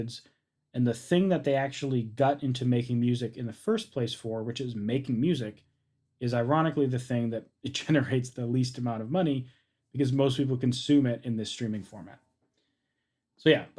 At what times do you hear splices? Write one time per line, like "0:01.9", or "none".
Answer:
none